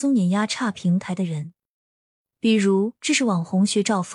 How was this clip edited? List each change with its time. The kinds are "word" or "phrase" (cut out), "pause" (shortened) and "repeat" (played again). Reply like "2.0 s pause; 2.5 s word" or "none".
none